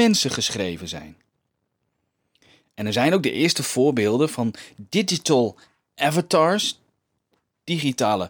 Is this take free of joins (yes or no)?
yes